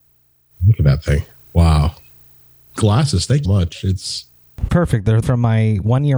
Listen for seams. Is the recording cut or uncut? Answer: cut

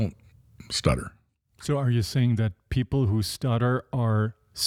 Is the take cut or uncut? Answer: uncut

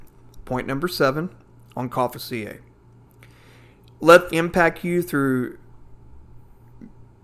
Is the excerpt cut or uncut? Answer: cut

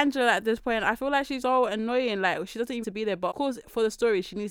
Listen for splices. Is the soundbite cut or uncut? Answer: cut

